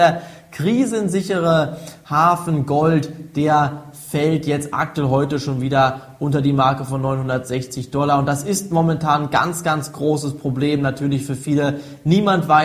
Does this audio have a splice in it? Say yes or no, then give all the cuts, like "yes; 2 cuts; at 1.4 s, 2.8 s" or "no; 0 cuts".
no; 0 cuts